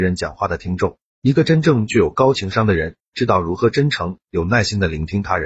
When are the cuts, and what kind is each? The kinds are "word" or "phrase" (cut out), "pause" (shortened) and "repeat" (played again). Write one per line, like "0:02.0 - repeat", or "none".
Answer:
0:01.1 - pause